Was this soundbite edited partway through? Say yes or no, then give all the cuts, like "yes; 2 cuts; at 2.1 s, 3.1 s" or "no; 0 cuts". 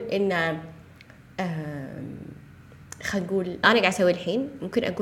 yes; 1 cut; at 3.6 s